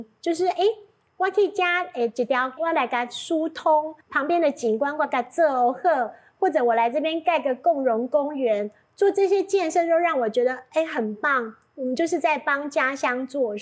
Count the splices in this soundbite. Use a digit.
2